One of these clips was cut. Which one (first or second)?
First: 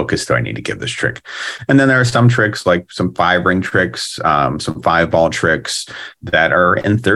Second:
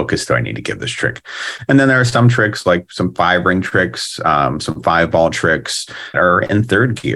second